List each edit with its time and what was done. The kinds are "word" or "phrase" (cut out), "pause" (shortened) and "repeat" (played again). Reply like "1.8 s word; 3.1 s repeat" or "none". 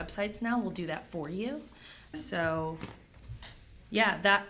2.1 s word